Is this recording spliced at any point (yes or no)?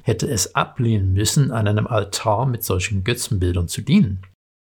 no